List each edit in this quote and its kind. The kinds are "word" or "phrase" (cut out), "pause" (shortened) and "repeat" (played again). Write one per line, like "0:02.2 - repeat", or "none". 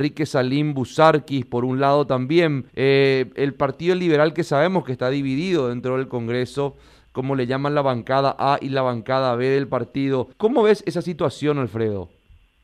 0:02.7 - pause
0:10.3 - pause

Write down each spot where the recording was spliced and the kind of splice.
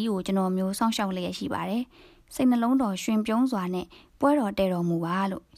none

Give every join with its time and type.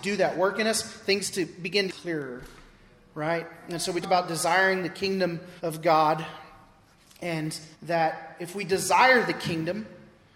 0:01.9 - phrase
0:04.0 - word
0:05.6 - pause
0:07.7 - pause

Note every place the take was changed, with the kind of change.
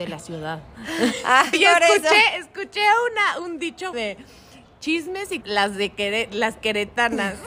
0:01.5 - word
0:03.9 - word
0:05.4 - word

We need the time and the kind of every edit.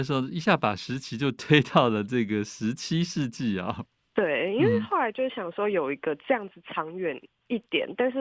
none

